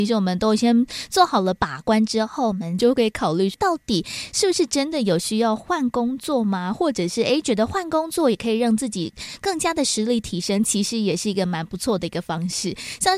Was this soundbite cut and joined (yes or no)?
yes